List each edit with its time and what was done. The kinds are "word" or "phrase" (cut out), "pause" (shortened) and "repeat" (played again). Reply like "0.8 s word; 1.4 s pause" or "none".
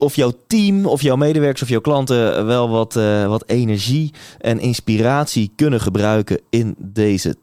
none